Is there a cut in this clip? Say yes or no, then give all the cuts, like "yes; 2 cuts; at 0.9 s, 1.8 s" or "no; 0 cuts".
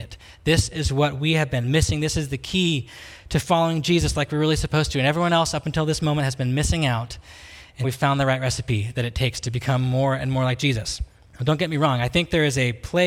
yes; 2 cuts; at 7.8 s, 11.3 s